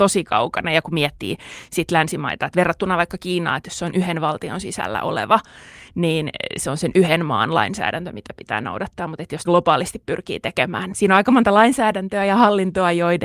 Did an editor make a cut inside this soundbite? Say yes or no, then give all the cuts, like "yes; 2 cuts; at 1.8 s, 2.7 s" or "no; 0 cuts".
yes; 2 cuts; at 9.5 s, 10.9 s